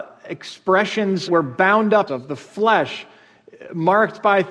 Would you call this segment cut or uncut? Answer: cut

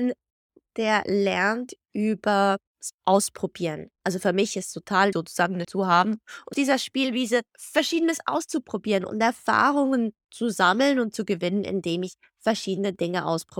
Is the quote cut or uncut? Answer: cut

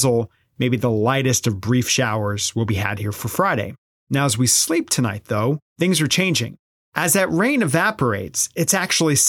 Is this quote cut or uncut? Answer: uncut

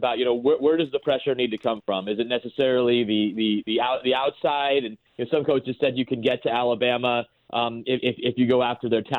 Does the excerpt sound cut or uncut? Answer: uncut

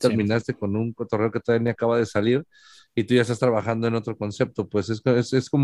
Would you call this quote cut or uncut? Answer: uncut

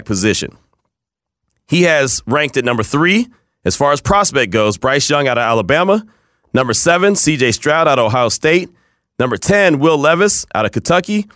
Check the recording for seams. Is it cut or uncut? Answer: uncut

